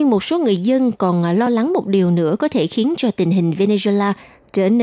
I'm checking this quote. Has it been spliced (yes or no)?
no